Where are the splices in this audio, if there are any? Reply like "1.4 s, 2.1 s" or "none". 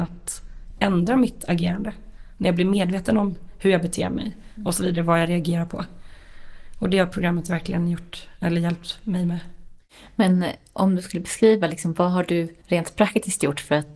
12.6 s